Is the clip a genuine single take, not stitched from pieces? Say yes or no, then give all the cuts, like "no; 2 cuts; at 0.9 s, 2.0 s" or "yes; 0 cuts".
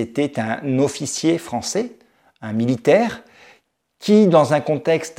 yes; 0 cuts